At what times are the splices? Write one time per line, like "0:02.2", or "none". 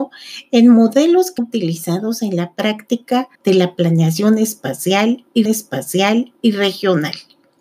0:01.4
0:03.3
0:05.5